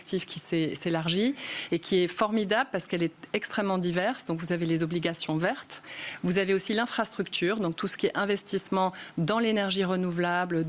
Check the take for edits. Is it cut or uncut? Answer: uncut